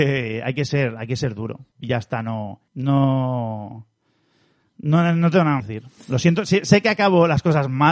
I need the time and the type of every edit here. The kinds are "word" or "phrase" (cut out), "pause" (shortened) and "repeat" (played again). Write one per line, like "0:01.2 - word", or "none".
0:01.7 - pause
0:02.7 - pause
0:05.6 - phrase